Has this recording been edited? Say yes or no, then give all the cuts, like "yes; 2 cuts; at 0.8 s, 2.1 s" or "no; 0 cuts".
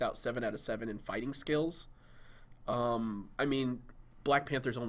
yes; 1 cut; at 3.3 s